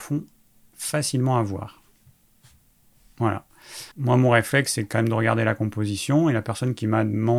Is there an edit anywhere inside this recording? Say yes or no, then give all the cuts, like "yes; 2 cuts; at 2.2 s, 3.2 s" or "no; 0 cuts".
yes; 1 cut; at 3.9 s